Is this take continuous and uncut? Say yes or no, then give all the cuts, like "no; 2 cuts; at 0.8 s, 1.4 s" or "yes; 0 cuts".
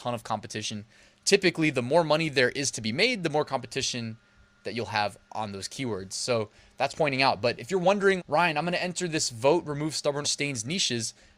no; 3 cuts; at 6.9 s, 8.2 s, 10.2 s